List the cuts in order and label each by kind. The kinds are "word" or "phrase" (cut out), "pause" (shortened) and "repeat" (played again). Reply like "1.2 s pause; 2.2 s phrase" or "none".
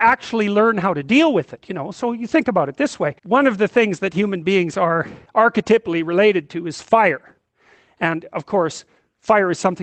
3.2 s pause; 5.3 s pause